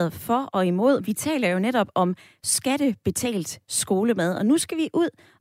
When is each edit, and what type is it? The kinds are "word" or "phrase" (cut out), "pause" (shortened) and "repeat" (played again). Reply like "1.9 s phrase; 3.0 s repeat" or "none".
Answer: none

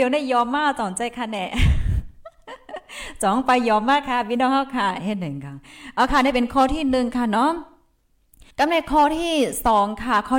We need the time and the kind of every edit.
8.5 s pause

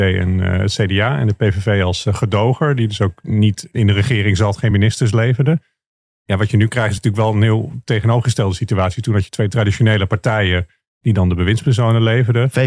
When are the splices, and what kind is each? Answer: none

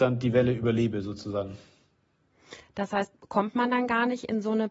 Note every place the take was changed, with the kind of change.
none

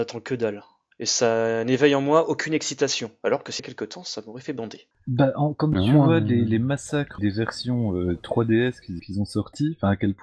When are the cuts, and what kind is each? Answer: 3.6 s phrase; 7.2 s word; 9.0 s word

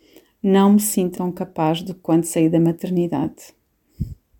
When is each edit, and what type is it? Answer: 1.1 s word

